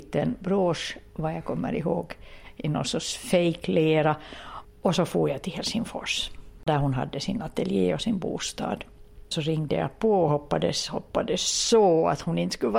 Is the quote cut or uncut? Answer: uncut